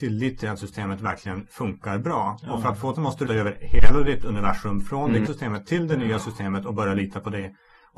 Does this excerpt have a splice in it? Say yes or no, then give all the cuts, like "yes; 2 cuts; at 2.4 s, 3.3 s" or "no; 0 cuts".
yes; 3 cuts; at 2.9 s, 3.3 s, 5.3 s